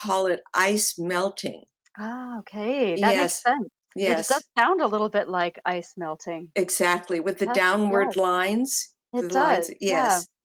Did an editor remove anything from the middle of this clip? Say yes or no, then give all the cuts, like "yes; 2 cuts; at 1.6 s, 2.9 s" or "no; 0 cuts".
yes; 1 cut; at 1.7 s